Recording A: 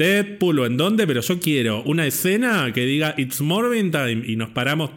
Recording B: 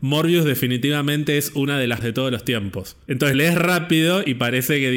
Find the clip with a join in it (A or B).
B